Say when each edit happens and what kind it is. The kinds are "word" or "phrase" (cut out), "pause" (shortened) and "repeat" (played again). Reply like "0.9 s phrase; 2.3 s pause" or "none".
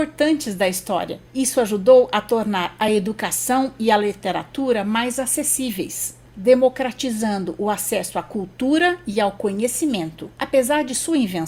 none